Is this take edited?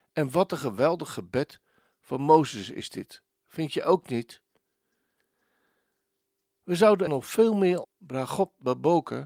yes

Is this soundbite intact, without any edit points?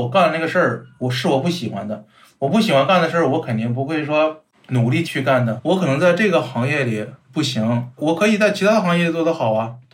yes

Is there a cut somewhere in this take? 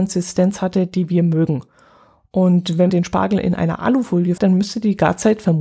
yes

